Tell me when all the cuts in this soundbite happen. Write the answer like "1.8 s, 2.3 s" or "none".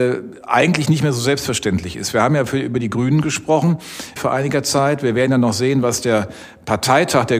4.2 s